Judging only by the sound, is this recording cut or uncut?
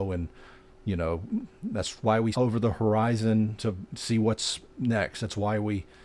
cut